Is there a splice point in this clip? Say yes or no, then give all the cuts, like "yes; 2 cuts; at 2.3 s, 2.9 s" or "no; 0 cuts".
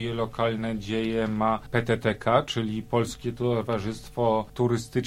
no; 0 cuts